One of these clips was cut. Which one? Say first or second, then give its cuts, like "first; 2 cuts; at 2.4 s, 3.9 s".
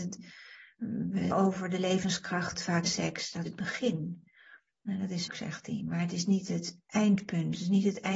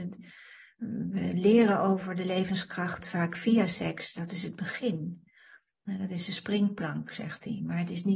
first; 4 cuts; at 1.3 s, 2.8 s, 3.5 s, 5.3 s